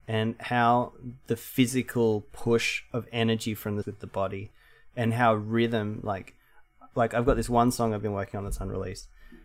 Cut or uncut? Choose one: cut